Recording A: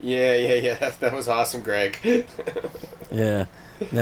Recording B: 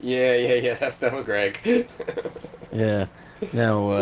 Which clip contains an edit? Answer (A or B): B